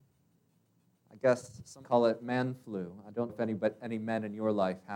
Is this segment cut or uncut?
cut